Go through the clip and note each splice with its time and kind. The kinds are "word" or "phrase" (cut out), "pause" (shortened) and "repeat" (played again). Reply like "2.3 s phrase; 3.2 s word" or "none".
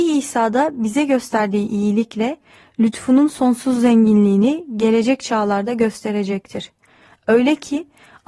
none